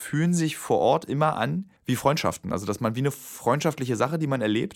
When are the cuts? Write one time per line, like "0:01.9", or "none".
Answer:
0:01.8